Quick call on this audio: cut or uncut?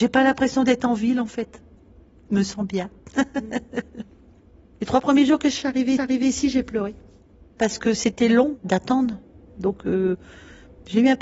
cut